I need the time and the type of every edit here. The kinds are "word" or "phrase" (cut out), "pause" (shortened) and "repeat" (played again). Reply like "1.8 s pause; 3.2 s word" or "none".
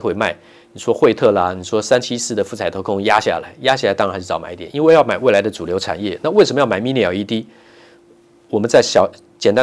none